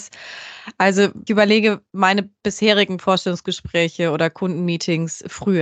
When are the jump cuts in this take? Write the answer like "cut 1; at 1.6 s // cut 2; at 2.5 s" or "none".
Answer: cut 1; at 1.3 s